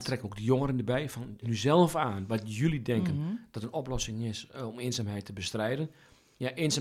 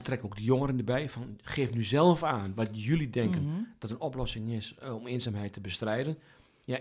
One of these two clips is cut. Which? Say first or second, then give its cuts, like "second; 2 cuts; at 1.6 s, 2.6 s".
first; 1 cut; at 1.4 s